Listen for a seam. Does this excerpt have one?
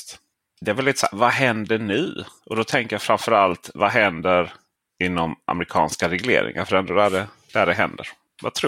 no; 0 cuts

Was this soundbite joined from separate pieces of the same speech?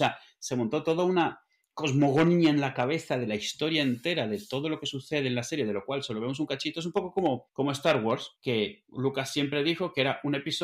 no; 0 cuts

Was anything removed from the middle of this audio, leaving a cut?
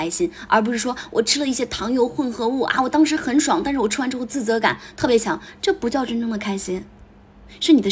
no; 0 cuts

